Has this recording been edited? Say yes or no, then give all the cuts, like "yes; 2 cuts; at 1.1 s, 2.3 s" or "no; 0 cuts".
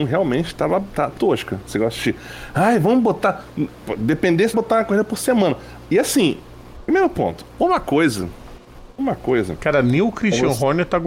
yes; 2 cuts; at 1.2 s, 4.5 s